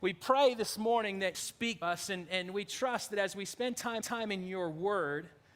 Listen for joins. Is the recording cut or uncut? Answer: cut